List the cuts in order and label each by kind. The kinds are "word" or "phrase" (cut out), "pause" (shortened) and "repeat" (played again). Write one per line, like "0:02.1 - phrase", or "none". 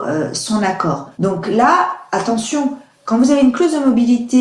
0:01.1 - pause

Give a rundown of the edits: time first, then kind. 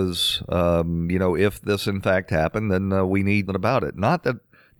0:03.5 - phrase

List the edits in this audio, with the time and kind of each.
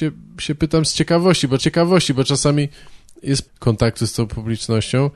0:01.6 - repeat
0:03.5 - phrase

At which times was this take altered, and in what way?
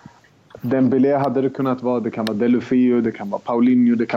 none

